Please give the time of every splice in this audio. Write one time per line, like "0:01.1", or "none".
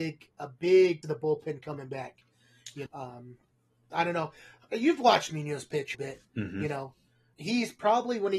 0:01.0
0:02.9
0:05.3
0:05.9
0:07.3